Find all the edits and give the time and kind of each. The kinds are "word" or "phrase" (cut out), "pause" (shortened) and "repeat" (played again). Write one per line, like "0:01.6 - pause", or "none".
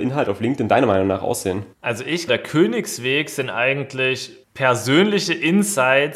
0:01.7 - pause
0:02.3 - word
0:04.4 - pause